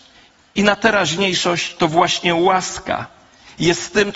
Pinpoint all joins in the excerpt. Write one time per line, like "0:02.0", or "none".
none